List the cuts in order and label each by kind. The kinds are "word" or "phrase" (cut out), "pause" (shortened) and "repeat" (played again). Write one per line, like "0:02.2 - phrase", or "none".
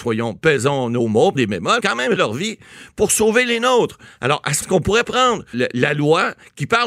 0:01.3 - word
0:01.8 - word
0:02.2 - word
0:04.6 - word
0:05.0 - word
0:05.5 - word